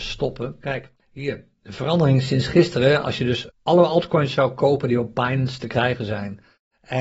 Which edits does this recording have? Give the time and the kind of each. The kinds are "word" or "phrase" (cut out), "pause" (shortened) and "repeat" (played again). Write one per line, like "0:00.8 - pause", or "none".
0:01.0 - pause
0:03.5 - word